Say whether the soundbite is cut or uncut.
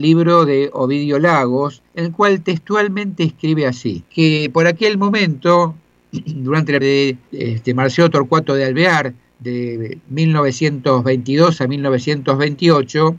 cut